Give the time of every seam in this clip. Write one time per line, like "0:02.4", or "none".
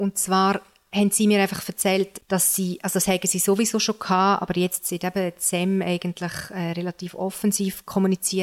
none